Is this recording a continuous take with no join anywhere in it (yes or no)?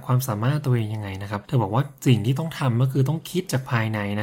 no